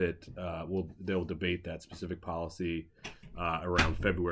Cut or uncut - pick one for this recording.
uncut